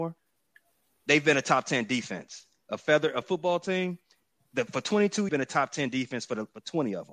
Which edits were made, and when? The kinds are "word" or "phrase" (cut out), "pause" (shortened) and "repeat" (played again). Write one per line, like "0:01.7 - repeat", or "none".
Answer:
0:03.2 - word
0:05.3 - phrase